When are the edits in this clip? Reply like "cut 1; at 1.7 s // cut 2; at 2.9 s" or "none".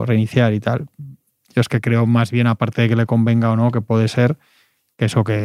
none